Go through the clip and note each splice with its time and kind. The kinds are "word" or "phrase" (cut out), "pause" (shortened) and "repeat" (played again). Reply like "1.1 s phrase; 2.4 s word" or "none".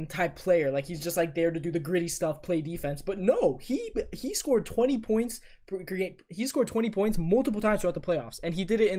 none